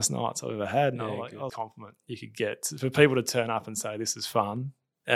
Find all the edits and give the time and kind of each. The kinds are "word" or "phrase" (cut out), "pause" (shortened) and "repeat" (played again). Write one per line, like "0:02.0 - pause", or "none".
0:01.5 - phrase